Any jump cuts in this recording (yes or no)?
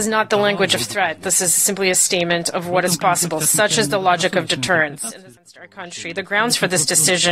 no